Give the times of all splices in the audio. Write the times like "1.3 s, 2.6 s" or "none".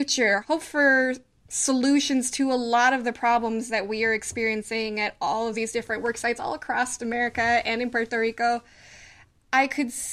none